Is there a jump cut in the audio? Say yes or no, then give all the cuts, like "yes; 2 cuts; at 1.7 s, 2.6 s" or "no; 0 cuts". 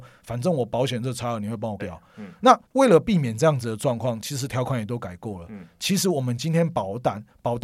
yes; 2 cuts; at 1.8 s, 2.7 s